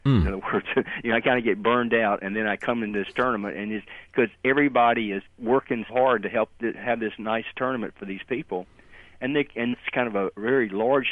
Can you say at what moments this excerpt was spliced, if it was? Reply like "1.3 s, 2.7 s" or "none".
5.3 s, 5.9 s, 9.7 s